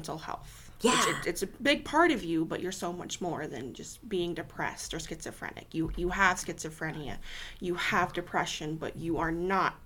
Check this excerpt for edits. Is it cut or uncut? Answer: uncut